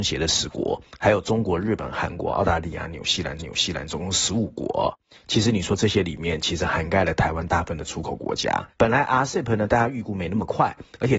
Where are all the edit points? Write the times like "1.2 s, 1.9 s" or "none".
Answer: 3.4 s, 8.7 s